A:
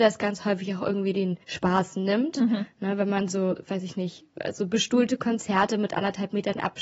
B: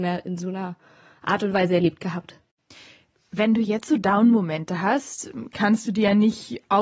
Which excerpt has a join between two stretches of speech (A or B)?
A